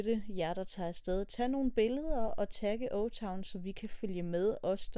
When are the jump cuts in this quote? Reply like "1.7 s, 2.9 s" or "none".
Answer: none